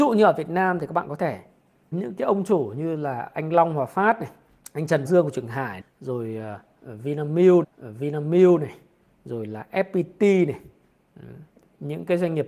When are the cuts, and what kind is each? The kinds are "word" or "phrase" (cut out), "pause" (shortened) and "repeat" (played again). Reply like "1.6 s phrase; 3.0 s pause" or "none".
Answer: 1.9 s phrase; 4.6 s pause; 5.1 s word; 5.8 s word; 7.6 s repeat